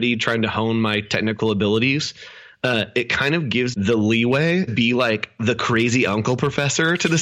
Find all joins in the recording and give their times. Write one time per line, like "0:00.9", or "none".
0:03.7
0:04.7